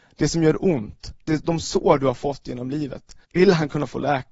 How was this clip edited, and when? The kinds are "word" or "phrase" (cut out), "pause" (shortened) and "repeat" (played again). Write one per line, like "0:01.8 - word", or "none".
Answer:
0:03.2 - pause